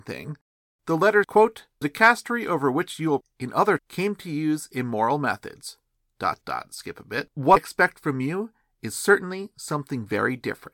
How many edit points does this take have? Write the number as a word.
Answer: six